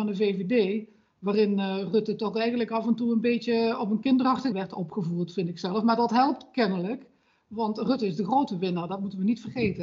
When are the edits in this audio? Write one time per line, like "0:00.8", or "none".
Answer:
0:04.5